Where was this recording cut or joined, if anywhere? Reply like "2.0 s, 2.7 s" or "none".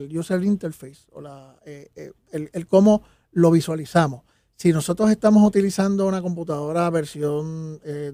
none